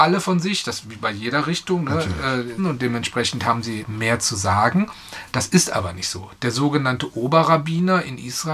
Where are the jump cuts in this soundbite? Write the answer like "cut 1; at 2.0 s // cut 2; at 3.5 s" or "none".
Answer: cut 1; at 2.6 s // cut 2; at 3.8 s